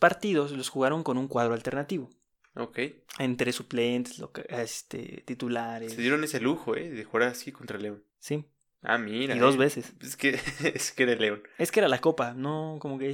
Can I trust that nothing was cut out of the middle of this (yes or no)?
no